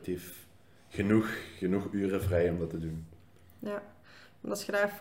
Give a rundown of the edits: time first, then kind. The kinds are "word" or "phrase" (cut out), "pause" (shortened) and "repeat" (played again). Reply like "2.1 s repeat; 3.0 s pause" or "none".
none